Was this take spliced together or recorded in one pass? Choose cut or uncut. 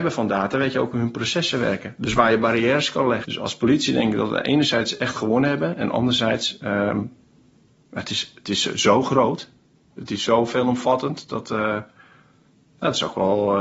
uncut